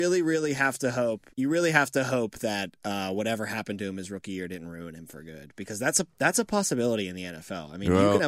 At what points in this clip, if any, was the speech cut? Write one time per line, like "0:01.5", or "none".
0:01.3